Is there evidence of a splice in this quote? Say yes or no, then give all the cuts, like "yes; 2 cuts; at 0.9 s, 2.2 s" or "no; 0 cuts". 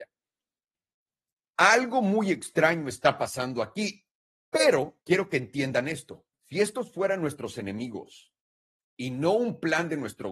yes; 2 cuts; at 5.0 s, 6.3 s